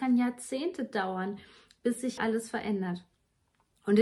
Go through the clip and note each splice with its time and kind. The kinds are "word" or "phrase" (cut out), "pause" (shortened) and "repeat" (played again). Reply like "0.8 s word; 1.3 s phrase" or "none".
2.2 s word